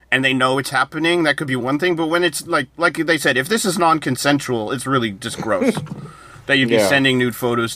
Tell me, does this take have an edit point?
yes; 1 cut; at 2.7 s

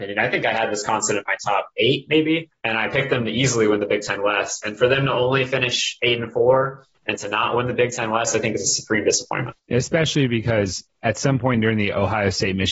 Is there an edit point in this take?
no; 0 cuts

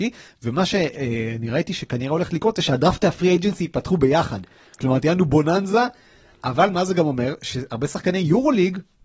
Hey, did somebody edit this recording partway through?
no; 0 cuts

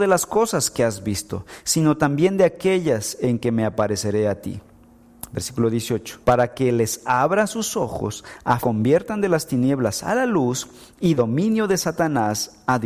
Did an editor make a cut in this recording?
yes; 3 cuts; at 6.2 s, 8.6 s, 11.2 s

